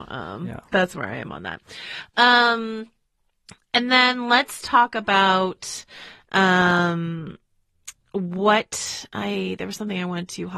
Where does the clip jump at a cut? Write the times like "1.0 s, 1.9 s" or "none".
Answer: none